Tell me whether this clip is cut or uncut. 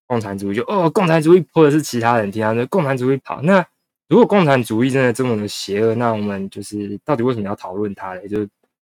cut